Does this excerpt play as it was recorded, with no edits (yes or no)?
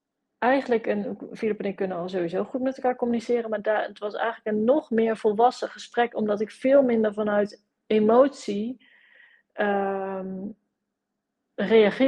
yes